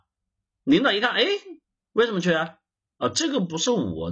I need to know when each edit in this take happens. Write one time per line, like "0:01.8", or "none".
0:01.6